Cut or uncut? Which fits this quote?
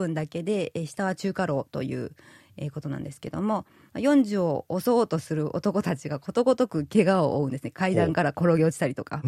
uncut